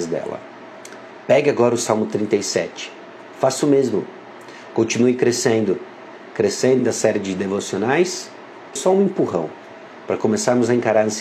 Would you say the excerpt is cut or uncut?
cut